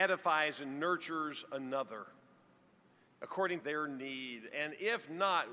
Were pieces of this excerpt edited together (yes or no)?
yes